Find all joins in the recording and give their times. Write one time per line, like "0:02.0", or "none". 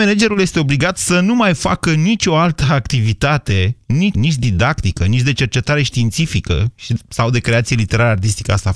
0:04.1